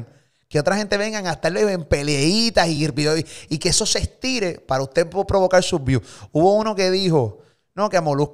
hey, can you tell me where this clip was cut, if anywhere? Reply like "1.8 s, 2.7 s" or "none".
none